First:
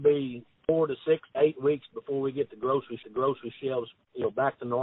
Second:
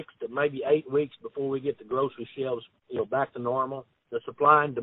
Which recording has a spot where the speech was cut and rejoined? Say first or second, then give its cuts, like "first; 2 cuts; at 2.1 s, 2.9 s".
first; 2 cuts; at 1.3 s, 3.0 s